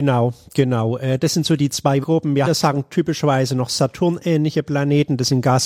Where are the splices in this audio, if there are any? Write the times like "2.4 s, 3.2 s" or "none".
2.0 s, 2.4 s

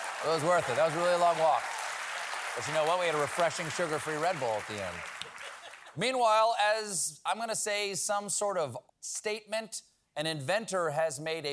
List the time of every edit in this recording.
8.9 s

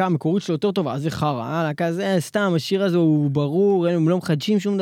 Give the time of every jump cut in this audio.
none

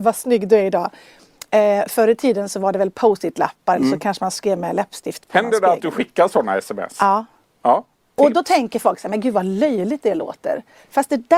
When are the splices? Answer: none

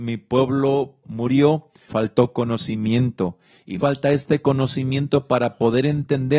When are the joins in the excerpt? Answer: 1.0 s, 1.9 s, 3.8 s

